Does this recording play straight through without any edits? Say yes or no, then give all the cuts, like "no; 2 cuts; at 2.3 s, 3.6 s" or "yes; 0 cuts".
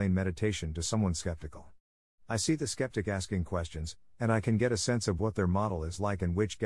yes; 0 cuts